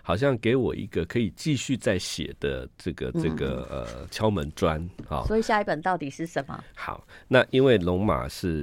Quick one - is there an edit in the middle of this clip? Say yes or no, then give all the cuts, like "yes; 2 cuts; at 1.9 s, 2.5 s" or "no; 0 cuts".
no; 0 cuts